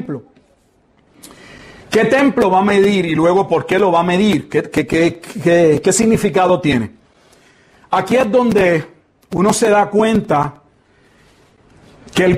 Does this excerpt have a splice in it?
no; 0 cuts

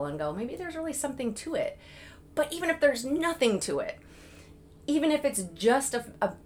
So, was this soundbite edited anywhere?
no; 0 cuts

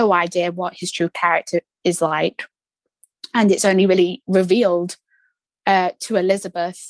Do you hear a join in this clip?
no; 0 cuts

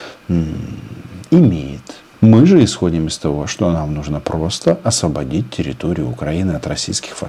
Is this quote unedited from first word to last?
yes; 0 cuts

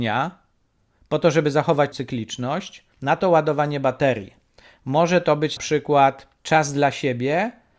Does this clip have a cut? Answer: yes; 4 cuts; at 1.9 s, 2.9 s, 5.6 s, 6.4 s

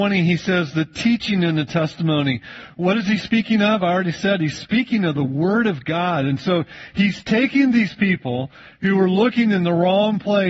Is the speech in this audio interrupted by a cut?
no; 0 cuts

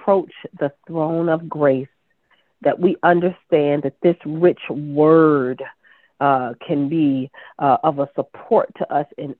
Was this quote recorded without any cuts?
yes; 0 cuts

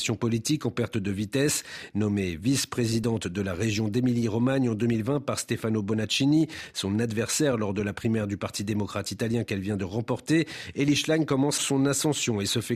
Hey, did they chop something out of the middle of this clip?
yes; 1 cut; at 11.6 s

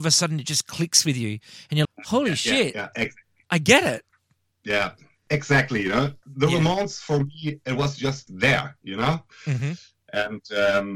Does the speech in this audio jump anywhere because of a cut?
yes; 4 cuts; at 1.8 s, 4.1 s, 4.5 s, 8.3 s

